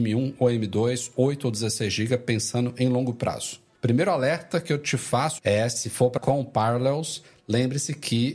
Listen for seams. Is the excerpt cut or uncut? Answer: cut